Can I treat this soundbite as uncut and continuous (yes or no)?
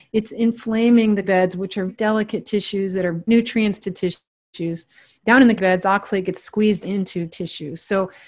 no